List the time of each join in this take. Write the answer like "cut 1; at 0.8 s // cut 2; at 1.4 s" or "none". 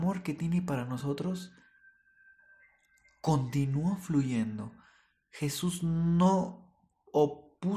none